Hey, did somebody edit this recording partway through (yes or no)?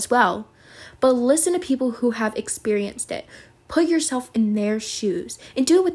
no